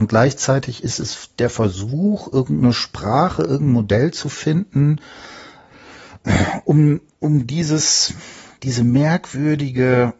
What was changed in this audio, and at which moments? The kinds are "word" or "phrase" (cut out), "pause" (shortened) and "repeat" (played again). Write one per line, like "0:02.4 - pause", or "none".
none